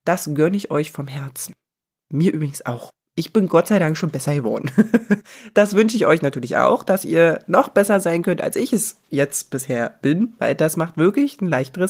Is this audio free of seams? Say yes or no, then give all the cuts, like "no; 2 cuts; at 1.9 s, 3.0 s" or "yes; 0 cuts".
yes; 0 cuts